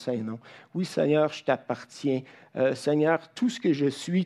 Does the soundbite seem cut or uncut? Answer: uncut